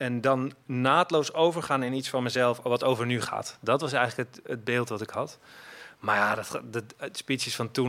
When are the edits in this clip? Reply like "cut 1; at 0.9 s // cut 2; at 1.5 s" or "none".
none